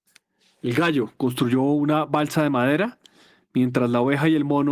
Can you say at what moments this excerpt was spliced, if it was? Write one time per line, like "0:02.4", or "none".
none